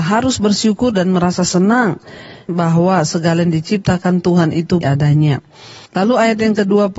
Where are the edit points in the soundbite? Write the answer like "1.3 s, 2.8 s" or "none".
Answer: 2.5 s, 4.8 s, 5.9 s